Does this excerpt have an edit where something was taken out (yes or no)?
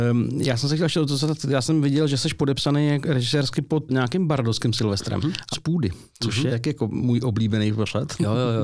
yes